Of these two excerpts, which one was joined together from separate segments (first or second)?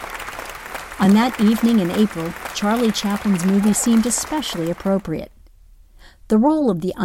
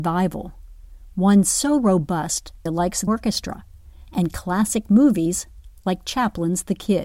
second